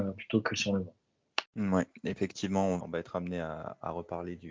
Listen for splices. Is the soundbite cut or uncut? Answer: cut